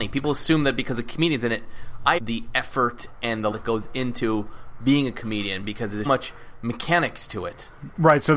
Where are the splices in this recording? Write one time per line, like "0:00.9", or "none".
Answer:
0:02.2
0:03.5
0:06.0